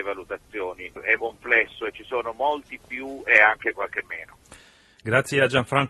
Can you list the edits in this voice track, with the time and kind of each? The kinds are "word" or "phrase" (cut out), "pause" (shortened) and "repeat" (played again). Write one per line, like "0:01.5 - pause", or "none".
0:01.2 - word